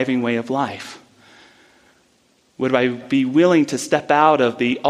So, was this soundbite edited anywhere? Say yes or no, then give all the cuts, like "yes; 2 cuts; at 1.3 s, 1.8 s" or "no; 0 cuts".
no; 0 cuts